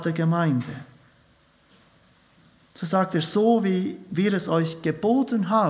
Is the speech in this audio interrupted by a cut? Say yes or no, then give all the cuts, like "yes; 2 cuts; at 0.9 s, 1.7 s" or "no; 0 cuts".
no; 0 cuts